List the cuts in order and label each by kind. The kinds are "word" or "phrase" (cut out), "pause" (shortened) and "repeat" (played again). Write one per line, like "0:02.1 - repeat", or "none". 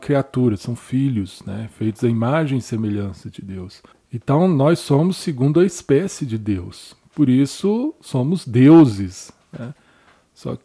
0:03.9 - pause